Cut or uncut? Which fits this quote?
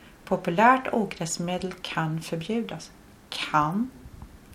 uncut